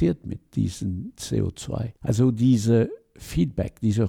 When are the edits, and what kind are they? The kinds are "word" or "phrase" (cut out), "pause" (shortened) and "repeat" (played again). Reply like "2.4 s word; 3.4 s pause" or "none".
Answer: 2.0 s pause